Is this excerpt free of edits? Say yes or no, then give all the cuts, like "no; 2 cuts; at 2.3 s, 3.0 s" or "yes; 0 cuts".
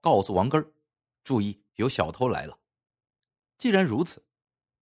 no; 2 cuts; at 1.7 s, 2.8 s